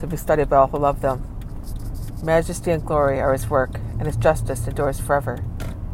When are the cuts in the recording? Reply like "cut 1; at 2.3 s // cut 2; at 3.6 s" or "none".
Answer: none